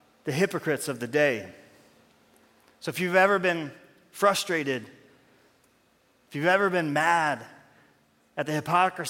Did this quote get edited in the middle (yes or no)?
no